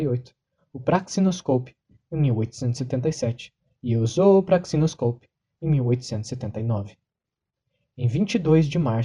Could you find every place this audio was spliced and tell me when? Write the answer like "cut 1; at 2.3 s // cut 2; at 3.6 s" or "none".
none